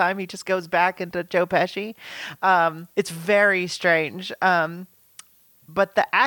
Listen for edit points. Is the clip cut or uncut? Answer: cut